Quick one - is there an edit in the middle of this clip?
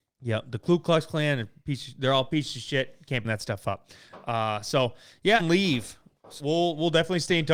yes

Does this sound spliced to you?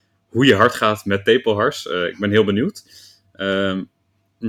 no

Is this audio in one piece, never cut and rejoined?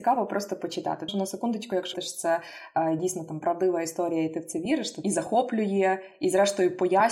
no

